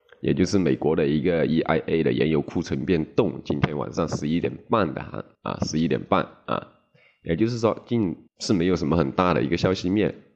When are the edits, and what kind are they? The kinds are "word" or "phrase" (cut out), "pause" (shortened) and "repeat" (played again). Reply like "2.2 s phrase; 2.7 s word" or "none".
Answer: 5.3 s pause; 8.3 s pause